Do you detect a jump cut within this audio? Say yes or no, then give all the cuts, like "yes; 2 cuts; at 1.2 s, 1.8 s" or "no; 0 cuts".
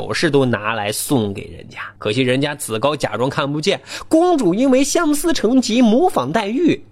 yes; 1 cut; at 2.0 s